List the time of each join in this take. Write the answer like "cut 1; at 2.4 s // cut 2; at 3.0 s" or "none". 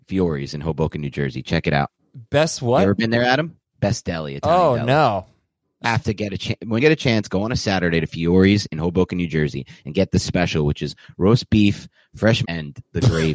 cut 1; at 5.8 s // cut 2; at 6.8 s // cut 3; at 12.4 s